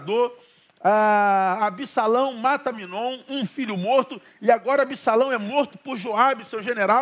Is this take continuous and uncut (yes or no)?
yes